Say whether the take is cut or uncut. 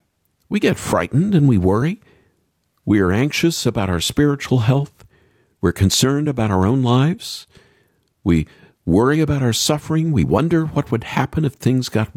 uncut